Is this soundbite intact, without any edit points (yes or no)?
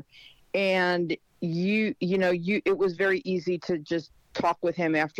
yes